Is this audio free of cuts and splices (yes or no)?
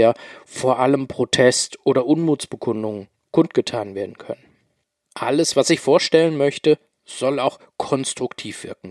yes